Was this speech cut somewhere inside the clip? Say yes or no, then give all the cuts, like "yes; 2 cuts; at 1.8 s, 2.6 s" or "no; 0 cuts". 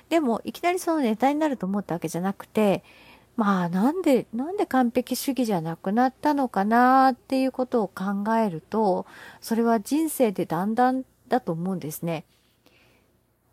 no; 0 cuts